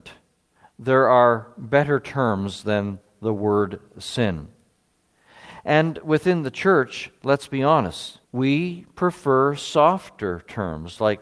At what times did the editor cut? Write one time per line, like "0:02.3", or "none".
0:08.2